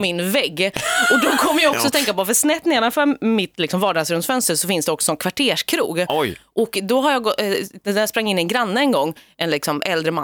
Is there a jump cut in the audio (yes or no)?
no